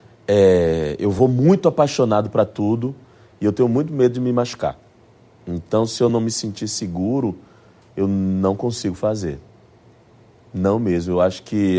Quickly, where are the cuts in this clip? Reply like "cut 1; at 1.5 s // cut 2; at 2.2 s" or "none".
none